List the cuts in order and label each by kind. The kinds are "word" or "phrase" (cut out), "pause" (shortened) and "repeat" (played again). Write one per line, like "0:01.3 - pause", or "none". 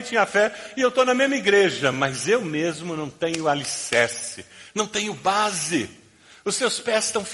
none